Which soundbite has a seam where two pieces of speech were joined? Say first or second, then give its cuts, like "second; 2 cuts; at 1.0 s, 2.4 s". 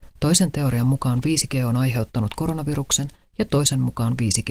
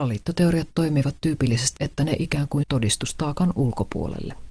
second; 2 cuts; at 1.8 s, 2.6 s